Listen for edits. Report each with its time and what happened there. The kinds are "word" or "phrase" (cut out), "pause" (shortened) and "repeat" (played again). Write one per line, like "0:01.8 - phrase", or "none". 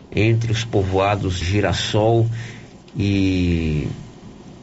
0:01.4 - word

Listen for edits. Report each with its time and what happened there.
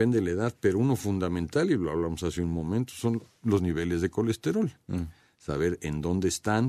none

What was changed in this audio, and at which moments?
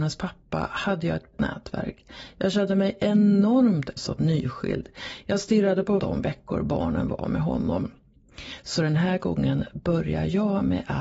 0:01.3 - word
0:04.0 - word
0:06.0 - word

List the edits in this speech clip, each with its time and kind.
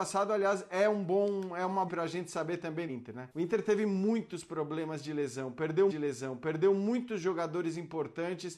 0:01.9 - phrase
0:02.9 - phrase
0:03.3 - pause
0:05.9 - repeat

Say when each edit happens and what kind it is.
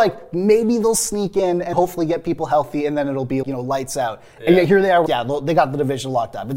0:01.7 - word
0:03.4 - word
0:05.1 - word

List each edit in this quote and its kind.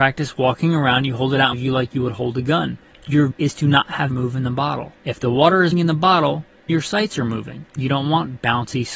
0:01.5 - phrase
0:03.3 - word
0:04.1 - phrase
0:05.0 - pause
0:05.7 - word
0:06.7 - word
0:07.7 - pause

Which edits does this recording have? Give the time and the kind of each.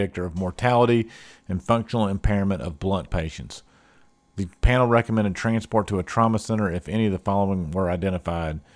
0:03.1 - word

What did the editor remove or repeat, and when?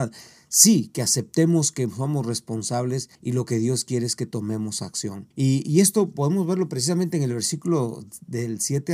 0:03.1 - pause
0:05.3 - pause

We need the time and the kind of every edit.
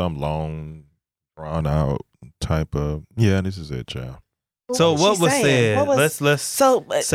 none

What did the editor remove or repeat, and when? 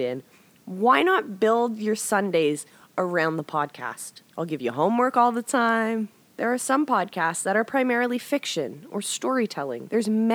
none

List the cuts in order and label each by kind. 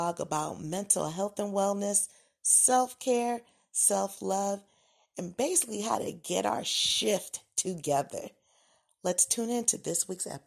none

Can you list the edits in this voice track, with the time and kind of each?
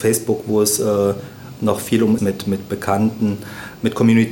0:02.2 - phrase

